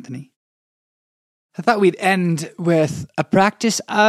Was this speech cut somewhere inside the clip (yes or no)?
no